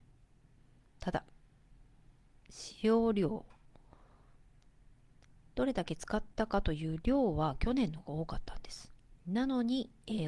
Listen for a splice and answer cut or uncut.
uncut